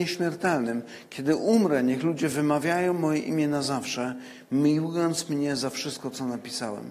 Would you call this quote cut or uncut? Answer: uncut